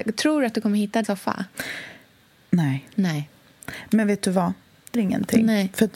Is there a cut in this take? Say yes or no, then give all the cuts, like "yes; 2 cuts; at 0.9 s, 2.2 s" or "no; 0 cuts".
yes; 2 cuts; at 1.0 s, 4.9 s